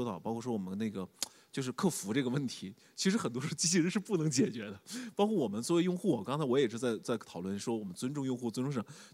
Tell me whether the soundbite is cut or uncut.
uncut